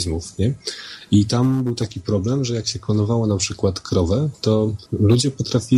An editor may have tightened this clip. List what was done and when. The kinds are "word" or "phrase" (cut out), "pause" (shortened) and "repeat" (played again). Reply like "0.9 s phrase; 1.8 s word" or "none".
4.9 s pause